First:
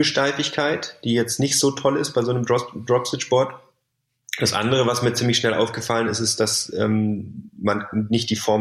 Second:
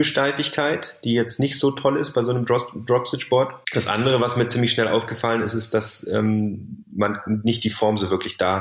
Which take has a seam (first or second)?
second